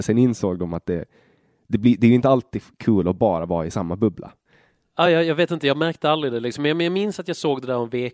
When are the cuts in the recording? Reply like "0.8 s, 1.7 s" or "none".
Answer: none